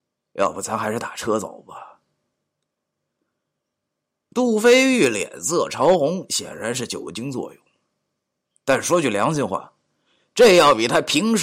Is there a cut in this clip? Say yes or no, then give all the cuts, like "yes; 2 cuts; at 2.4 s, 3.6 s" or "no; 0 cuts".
no; 0 cuts